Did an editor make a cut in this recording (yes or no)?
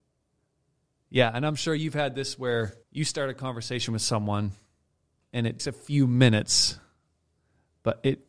yes